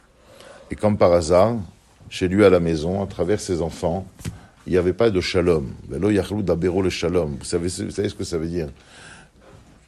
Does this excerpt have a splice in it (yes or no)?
no